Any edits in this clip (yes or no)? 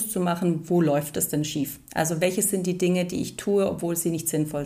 no